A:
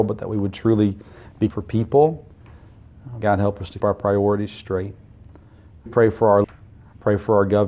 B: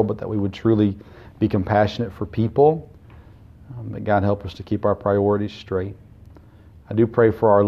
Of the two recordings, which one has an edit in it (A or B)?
A